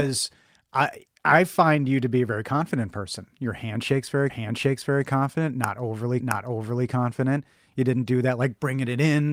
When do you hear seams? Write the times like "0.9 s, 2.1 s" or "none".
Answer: 4.3 s, 6.2 s